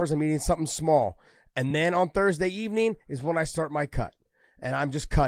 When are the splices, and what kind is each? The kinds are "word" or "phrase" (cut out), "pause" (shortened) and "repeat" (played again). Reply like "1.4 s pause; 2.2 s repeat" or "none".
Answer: none